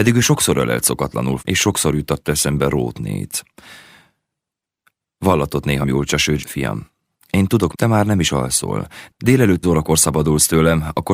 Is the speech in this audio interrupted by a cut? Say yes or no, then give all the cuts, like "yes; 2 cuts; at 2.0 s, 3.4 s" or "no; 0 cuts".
yes; 5 cuts; at 1.4 s, 5.8 s, 6.4 s, 7.7 s, 9.6 s